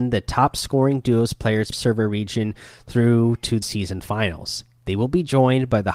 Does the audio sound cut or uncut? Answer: cut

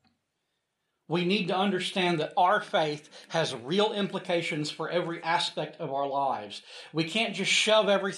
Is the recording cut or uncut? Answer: uncut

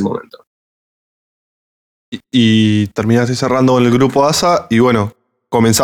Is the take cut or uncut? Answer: uncut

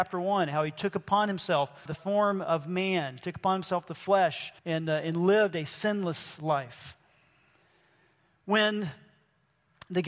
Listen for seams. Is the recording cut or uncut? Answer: cut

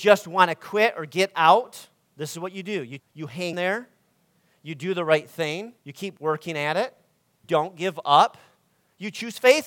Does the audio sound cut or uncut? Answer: cut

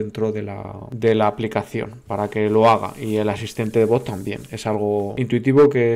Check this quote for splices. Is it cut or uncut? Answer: uncut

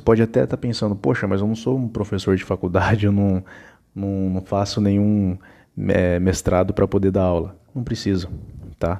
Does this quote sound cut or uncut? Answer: uncut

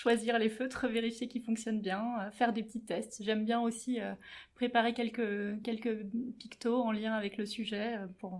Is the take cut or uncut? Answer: uncut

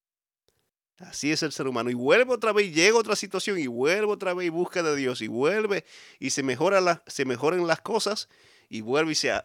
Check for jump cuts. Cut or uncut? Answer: uncut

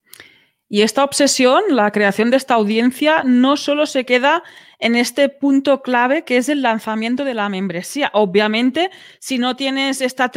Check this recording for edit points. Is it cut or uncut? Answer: uncut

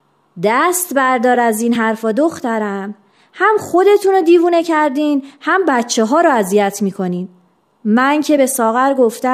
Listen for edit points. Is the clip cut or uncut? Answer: uncut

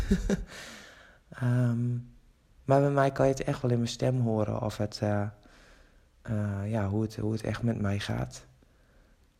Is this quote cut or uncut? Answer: uncut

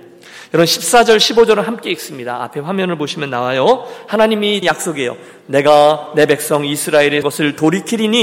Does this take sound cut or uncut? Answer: cut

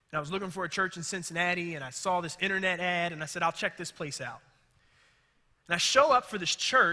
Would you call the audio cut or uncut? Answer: uncut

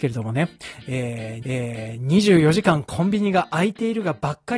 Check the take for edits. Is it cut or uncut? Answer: cut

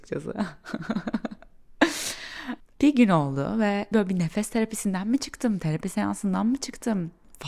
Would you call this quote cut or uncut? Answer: cut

